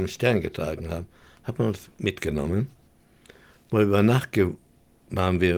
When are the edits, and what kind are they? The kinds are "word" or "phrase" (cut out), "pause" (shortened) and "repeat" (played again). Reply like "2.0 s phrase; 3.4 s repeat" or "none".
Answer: 1.9 s pause